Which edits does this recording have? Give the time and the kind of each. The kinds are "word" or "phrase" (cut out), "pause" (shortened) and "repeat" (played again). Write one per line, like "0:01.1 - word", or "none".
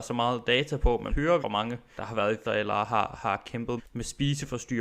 0:01.1 - word
0:01.4 - word
0:02.0 - word
0:02.4 - word
0:03.8 - word